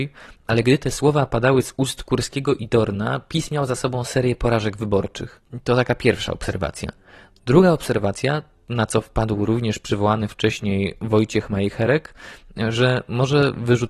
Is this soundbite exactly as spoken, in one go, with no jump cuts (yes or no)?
yes